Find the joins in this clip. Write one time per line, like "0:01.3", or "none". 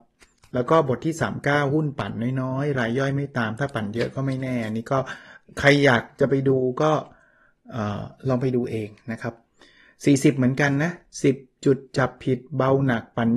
none